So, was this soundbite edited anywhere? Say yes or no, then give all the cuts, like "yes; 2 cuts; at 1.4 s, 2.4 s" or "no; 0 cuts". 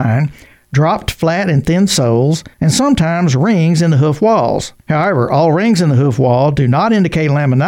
yes; 2 cuts; at 2.5 s, 4.8 s